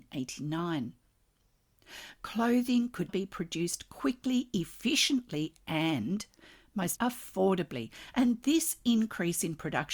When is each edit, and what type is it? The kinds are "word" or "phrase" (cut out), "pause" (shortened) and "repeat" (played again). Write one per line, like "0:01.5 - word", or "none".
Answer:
0:03.1 - word
0:07.0 - word